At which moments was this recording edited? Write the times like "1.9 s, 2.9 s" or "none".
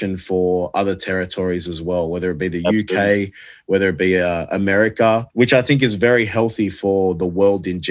5.3 s